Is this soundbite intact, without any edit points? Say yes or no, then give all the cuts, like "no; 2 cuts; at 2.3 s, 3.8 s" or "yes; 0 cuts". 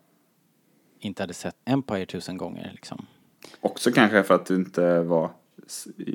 no; 2 cuts; at 1.6 s, 3.6 s